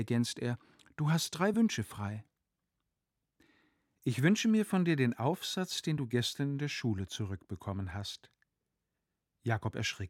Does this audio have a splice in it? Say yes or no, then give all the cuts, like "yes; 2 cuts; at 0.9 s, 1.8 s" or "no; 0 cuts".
no; 0 cuts